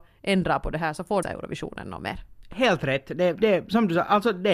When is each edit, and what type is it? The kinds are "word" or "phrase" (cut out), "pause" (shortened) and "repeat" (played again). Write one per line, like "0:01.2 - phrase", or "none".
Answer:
0:01.2 - phrase
0:03.4 - word